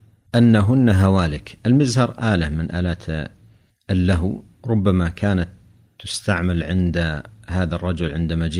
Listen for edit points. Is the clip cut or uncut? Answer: uncut